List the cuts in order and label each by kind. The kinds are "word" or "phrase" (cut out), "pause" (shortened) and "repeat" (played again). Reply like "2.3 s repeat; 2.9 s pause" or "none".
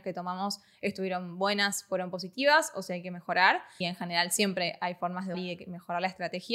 3.8 s word; 5.3 s word